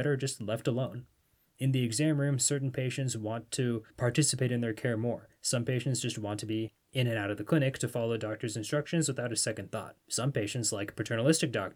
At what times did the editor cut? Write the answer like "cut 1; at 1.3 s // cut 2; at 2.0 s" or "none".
cut 1; at 3.9 s // cut 2; at 10.0 s

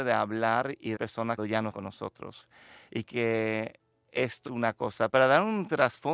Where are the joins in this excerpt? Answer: cut 1; at 1.0 s // cut 2; at 1.4 s // cut 3; at 1.7 s // cut 4; at 3.1 s // cut 5; at 4.5 s // cut 6; at 5.1 s

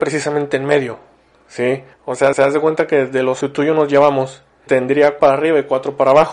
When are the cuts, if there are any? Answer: cut 1; at 1.9 s // cut 2; at 2.3 s // cut 3; at 3.4 s // cut 4; at 4.7 s // cut 5; at 5.2 s

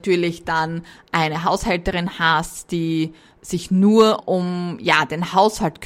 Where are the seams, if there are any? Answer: cut 1; at 4.2 s

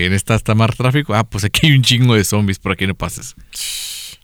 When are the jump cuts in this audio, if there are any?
none

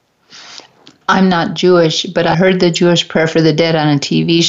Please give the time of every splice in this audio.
cut 1; at 2.3 s

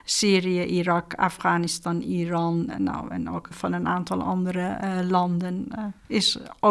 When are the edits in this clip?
cut 1; at 2.7 s // cut 2; at 3.5 s

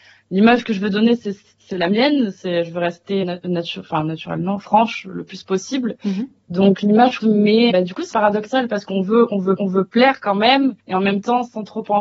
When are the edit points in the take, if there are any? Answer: cut 1; at 3.2 s // cut 2; at 7.2 s // cut 3; at 7.7 s // cut 4; at 8.1 s // cut 5; at 9.6 s // cut 6; at 10.8 s

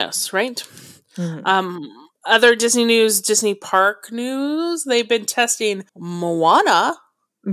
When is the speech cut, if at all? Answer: cut 1; at 5.9 s

